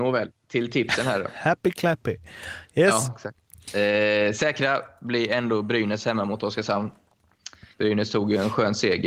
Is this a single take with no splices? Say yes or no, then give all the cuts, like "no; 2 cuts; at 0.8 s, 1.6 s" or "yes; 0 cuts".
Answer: no; 1 cut; at 7.7 s